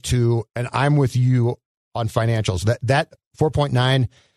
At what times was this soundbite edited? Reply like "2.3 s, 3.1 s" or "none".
none